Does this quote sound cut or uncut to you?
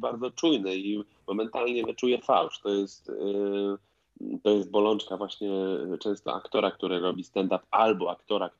uncut